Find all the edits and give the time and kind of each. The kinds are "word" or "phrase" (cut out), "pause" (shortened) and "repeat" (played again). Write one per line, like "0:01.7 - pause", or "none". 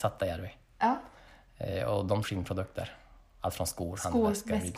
0:02.2 - word